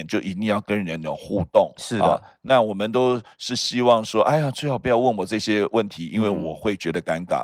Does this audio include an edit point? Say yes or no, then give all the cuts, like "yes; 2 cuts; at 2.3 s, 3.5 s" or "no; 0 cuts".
no; 0 cuts